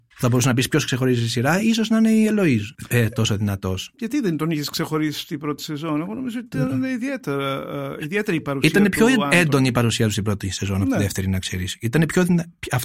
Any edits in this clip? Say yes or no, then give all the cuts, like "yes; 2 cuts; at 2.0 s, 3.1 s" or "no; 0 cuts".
no; 0 cuts